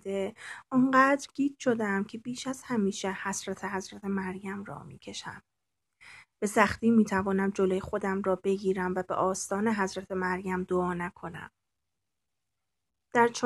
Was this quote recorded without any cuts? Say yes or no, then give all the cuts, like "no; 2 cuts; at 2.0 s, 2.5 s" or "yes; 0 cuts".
yes; 0 cuts